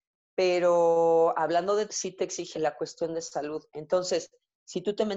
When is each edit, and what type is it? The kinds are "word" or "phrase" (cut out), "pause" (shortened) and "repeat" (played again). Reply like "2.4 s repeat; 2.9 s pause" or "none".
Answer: 1.9 s word; 2.5 s word